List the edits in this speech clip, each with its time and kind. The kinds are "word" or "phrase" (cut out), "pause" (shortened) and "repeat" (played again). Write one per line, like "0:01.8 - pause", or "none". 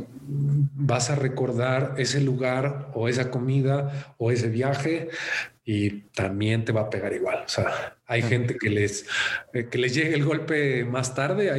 0:06.1 - pause